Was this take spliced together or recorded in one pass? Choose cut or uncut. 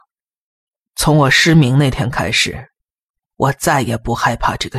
uncut